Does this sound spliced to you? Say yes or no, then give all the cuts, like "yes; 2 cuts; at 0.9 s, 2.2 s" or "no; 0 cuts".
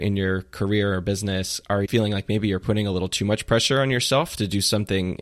yes; 1 cut; at 1.9 s